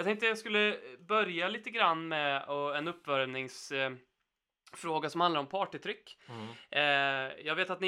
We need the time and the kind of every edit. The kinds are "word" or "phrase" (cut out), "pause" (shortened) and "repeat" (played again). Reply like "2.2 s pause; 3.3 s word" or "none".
none

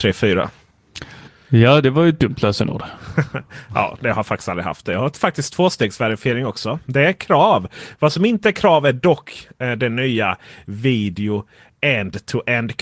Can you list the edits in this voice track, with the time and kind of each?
none

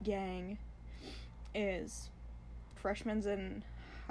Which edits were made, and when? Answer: 2.8 s word

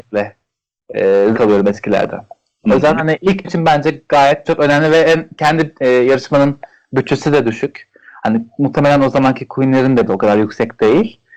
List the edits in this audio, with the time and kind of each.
1.3 s word; 3.4 s word; 4.4 s word; 10.1 s word

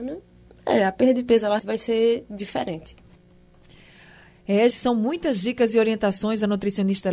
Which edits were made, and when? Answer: 1.6 s word; 4.7 s word

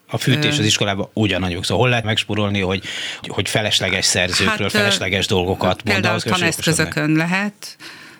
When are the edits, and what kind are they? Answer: 2.0 s word; 3.2 s word

